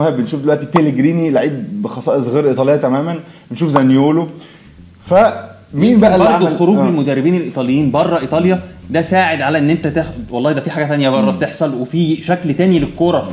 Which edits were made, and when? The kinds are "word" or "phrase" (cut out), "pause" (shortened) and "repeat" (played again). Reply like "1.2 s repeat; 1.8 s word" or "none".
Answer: none